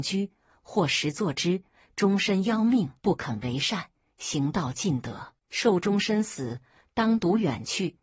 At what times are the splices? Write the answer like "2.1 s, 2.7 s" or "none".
3.0 s, 5.4 s